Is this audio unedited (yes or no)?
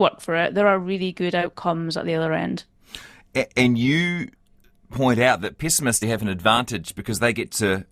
no